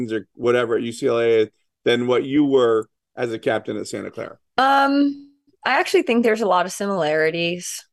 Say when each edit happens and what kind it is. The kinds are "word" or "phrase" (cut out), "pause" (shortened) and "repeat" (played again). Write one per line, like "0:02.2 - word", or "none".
none